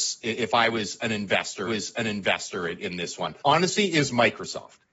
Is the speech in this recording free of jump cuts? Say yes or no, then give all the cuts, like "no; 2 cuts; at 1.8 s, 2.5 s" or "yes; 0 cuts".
no; 2 cuts; at 1.7 s, 3.4 s